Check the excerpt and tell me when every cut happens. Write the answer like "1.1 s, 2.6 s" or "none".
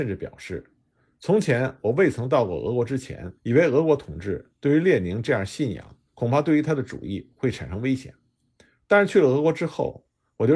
3.4 s, 6.1 s